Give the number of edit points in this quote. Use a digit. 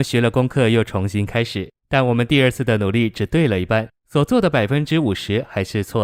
2